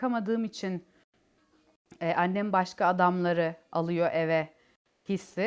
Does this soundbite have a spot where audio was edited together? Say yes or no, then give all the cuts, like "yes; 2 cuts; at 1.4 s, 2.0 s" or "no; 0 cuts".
no; 0 cuts